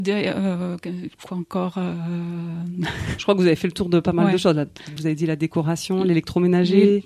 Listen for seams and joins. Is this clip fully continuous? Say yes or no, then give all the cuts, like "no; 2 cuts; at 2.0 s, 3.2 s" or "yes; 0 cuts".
no; 1 cut; at 5.0 s